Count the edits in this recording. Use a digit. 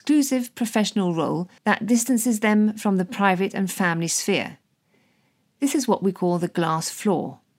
1